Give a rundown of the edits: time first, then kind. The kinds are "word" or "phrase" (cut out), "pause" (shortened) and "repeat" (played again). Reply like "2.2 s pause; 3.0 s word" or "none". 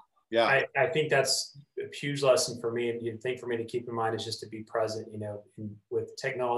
none